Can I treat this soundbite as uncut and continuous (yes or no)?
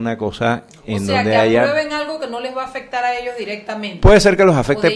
yes